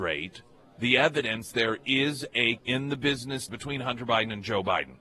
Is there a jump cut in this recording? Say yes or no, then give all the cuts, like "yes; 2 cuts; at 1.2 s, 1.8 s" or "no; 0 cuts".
yes; 3 cuts; at 1.5 s, 2.6 s, 3.5 s